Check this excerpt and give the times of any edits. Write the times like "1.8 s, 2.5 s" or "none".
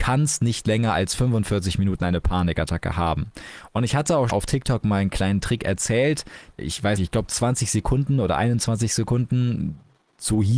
4.3 s, 6.6 s, 7.0 s